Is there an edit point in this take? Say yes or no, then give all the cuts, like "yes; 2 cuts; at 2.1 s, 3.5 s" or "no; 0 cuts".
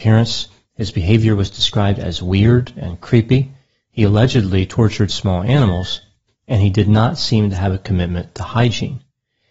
no; 0 cuts